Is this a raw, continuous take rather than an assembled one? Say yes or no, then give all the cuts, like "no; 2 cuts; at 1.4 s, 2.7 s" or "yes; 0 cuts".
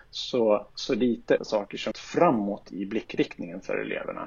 no; 2 cuts; at 1.4 s, 1.9 s